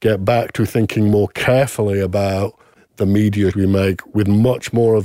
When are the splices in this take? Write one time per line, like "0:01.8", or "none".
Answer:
0:03.5